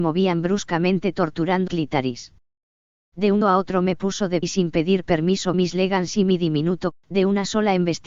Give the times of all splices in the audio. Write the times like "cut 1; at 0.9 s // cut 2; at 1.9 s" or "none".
cut 1; at 1.7 s // cut 2; at 3.4 s // cut 3; at 4.4 s // cut 4; at 5.5 s // cut 5; at 6.9 s